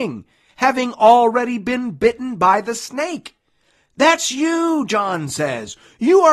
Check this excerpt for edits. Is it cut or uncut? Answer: uncut